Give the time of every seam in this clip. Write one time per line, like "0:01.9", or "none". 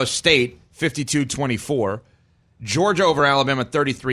none